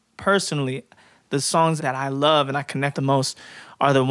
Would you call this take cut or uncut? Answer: cut